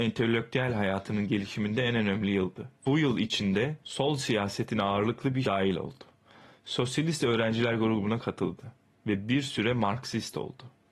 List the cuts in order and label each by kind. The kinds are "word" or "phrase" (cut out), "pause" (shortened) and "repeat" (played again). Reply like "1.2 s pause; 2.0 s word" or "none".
2.8 s pause; 3.8 s pause; 5.4 s word